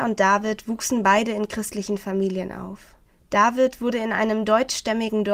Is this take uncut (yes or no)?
no